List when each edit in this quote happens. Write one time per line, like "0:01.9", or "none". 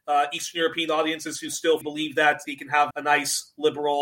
0:01.8
0:02.4
0:02.9